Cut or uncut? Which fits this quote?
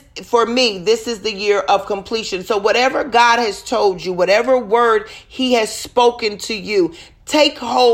uncut